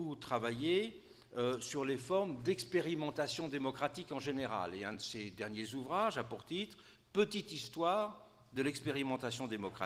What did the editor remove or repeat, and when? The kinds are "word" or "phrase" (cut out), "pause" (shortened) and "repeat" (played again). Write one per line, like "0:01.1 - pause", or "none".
none